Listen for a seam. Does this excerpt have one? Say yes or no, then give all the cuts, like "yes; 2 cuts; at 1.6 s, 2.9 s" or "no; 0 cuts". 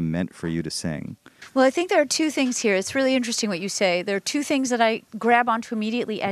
yes; 1 cut; at 5.1 s